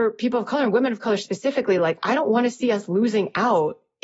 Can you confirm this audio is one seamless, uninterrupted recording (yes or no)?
yes